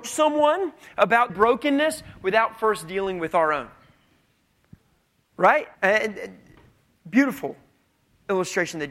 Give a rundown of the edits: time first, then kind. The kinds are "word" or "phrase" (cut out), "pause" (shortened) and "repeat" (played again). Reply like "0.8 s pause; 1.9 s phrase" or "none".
1.3 s word; 5.7 s pause